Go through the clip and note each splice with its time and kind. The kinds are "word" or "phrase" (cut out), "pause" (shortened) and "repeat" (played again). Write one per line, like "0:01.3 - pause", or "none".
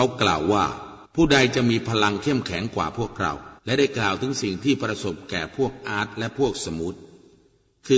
0:01.0 - pause
0:03.6 - pause